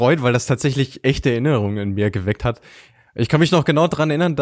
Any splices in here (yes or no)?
no